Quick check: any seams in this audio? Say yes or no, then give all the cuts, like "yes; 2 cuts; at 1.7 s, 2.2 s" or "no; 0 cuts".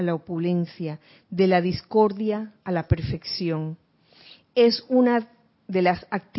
no; 0 cuts